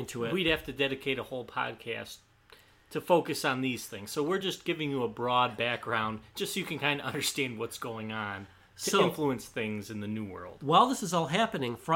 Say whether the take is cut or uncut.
uncut